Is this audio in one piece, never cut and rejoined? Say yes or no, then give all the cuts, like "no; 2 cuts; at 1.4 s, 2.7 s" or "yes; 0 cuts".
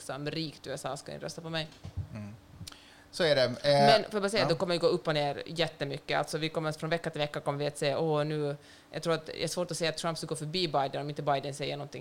yes; 0 cuts